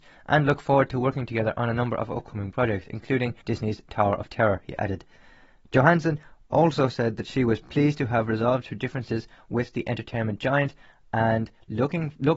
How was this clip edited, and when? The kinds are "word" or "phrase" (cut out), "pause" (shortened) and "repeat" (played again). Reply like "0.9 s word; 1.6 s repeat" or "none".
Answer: 3.4 s pause